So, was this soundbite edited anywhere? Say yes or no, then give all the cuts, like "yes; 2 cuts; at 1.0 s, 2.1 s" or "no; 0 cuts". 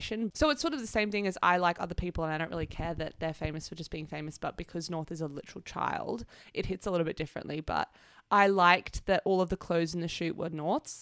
no; 0 cuts